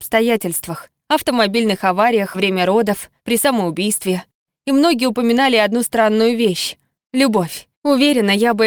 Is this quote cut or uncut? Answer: cut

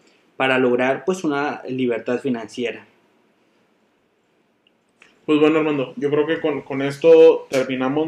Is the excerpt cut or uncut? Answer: uncut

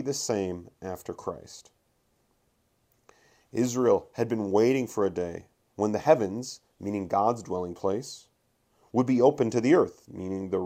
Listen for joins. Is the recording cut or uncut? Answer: uncut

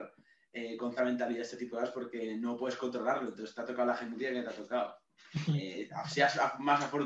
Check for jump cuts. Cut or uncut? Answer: cut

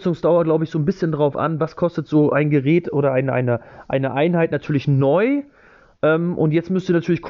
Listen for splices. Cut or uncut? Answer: uncut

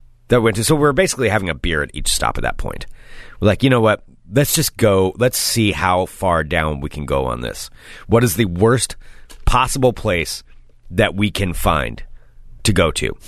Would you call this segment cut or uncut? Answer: uncut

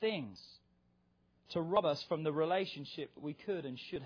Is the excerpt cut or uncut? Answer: uncut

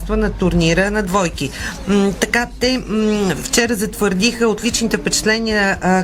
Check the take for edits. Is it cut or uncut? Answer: uncut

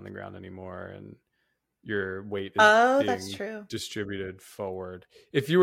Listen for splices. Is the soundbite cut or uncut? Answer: uncut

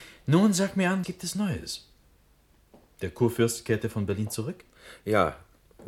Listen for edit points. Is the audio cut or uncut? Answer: cut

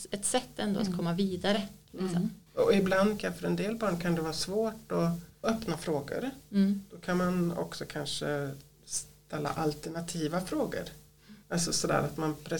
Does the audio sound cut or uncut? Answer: cut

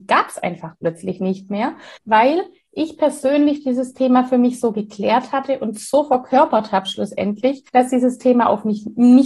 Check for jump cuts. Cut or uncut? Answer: cut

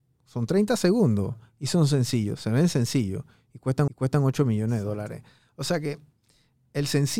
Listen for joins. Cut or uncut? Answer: cut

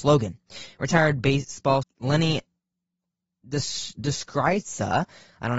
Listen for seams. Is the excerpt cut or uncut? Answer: cut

